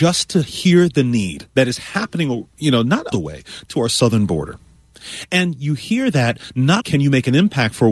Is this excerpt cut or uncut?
cut